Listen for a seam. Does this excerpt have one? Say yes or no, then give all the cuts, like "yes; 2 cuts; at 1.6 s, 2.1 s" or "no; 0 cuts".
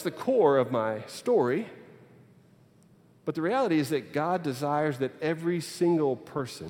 no; 0 cuts